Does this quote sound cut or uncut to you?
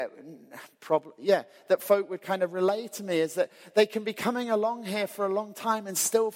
uncut